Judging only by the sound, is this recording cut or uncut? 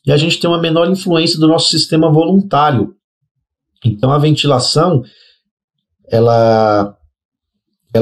uncut